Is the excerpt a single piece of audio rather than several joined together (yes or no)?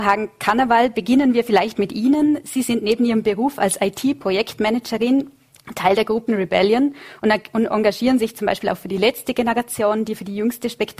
no